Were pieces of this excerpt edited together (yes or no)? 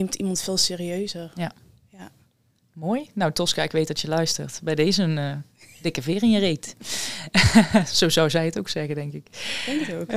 no